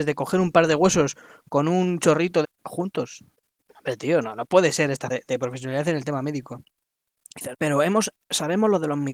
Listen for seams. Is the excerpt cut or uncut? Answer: cut